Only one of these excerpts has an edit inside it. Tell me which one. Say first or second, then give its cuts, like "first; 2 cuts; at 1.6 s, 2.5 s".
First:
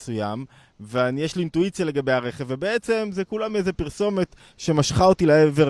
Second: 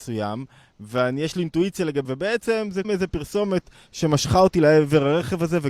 second; 2 cuts; at 2.0 s, 2.8 s